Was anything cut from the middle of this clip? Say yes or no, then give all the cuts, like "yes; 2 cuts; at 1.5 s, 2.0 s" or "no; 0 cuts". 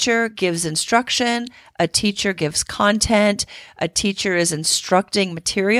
no; 0 cuts